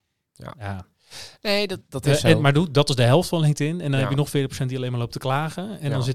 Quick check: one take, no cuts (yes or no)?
no